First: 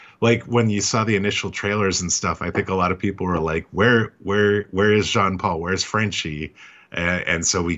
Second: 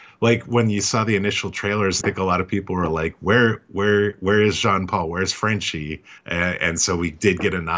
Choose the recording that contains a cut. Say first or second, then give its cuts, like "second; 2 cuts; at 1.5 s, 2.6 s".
second; 2 cuts; at 2.0 s, 6.2 s